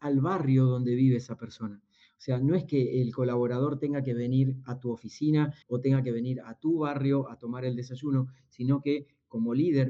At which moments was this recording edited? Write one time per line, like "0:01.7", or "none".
0:05.6